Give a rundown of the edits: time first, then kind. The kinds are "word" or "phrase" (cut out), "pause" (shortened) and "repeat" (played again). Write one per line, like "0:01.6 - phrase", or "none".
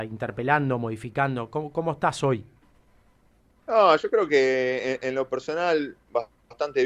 none